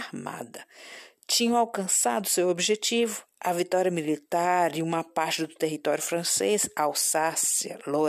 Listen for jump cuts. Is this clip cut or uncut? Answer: uncut